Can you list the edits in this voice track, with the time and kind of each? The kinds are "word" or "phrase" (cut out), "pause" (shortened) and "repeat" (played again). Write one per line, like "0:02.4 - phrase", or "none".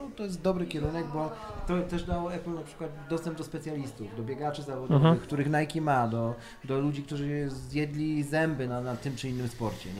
0:08.7 - word